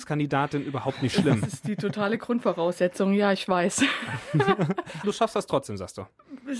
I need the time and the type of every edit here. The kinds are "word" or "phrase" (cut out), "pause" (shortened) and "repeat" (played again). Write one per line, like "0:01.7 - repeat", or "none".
0:05.0 - word